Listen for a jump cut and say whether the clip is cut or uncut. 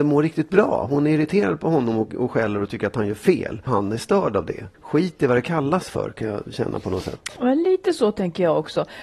cut